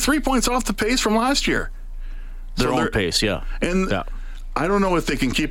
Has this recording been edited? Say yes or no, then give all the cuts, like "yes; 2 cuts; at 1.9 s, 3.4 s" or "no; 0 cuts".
no; 0 cuts